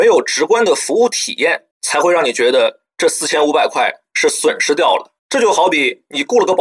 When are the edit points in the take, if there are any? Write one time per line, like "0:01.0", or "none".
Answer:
0:01.7
0:05.2